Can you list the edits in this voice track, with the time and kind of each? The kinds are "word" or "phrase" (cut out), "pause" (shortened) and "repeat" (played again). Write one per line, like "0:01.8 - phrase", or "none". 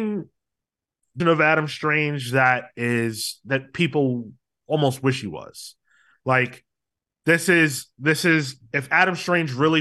0:01.2 - word